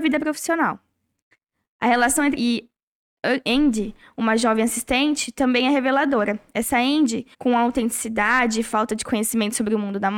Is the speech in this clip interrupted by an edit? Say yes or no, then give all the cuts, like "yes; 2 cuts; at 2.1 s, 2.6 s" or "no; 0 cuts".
yes; 2 cuts; at 2.3 s, 7.3 s